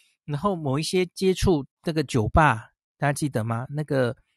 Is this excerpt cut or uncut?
cut